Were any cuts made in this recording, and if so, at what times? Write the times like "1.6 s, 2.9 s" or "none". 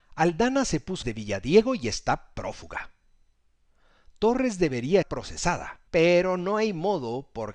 1.0 s, 5.0 s, 5.9 s